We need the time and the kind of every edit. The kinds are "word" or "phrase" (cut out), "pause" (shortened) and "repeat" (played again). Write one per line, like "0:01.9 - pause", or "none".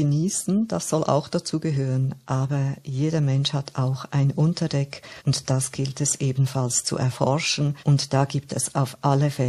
0:05.2 - pause
0:07.8 - pause